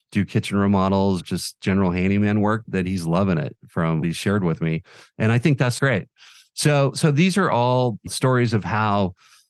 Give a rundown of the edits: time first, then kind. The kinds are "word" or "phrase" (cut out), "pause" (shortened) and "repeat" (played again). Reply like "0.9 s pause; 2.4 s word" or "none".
1.2 s word; 2.6 s word; 4.0 s word; 5.8 s word; 8.1 s word